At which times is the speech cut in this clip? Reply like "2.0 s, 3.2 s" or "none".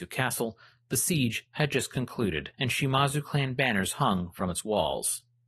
2.5 s